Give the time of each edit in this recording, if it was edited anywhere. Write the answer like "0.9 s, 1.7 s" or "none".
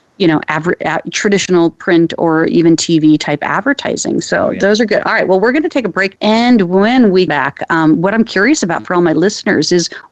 6.2 s, 7.3 s